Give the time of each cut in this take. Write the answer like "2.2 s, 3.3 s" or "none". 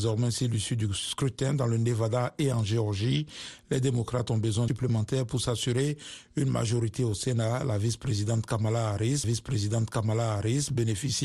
4.7 s, 9.2 s

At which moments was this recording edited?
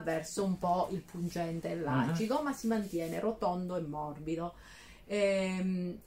none

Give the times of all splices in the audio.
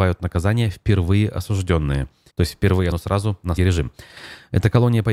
2.3 s, 2.9 s, 3.6 s

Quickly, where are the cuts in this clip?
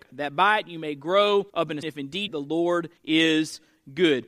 1.5 s, 1.8 s, 2.3 s, 3.0 s

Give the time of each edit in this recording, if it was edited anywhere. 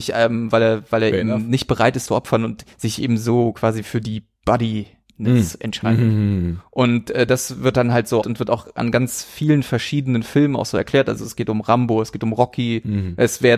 2.1 s, 2.7 s, 8.2 s

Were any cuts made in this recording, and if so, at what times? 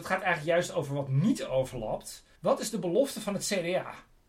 2.3 s

